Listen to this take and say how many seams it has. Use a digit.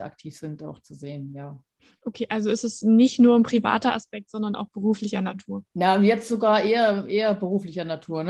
2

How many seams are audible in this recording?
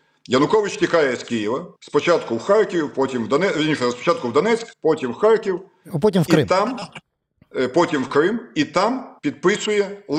3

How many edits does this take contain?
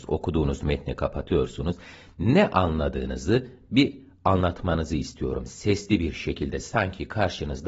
0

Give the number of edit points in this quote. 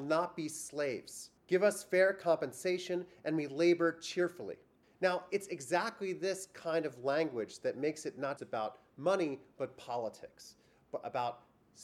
3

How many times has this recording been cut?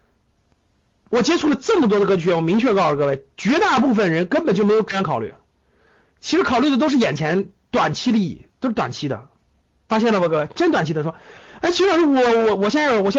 0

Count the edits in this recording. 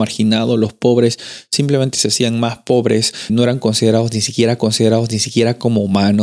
2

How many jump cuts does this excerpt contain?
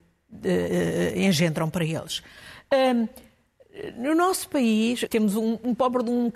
1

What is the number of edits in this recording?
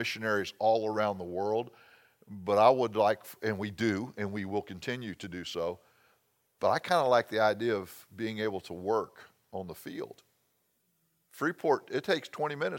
0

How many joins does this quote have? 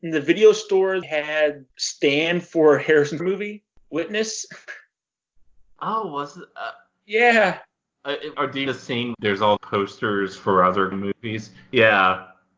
8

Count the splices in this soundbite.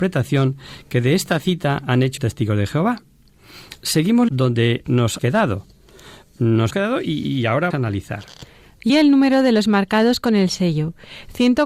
6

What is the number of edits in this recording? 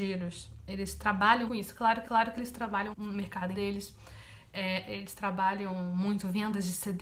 4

